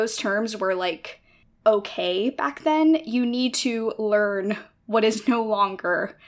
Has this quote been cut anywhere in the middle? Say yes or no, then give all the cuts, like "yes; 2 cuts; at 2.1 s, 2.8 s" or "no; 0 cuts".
no; 0 cuts